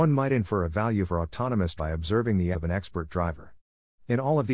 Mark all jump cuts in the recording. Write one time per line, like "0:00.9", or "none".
0:01.1
0:01.8
0:02.5